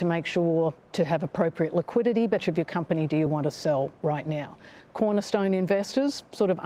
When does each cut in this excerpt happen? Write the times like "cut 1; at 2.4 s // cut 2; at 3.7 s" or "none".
cut 1; at 0.9 s // cut 2; at 2.4 s // cut 3; at 3.3 s